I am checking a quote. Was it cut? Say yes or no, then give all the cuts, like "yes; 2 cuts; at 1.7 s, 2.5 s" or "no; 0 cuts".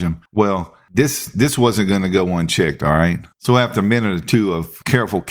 yes; 1 cut; at 3.3 s